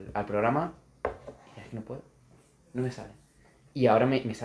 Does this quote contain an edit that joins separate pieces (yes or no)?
no